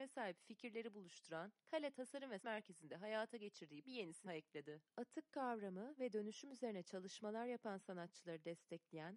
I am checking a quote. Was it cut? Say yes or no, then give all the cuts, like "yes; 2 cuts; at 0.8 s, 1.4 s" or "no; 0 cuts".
yes; 5 cuts; at 1.6 s, 2.4 s, 3.8 s, 4.3 s, 4.9 s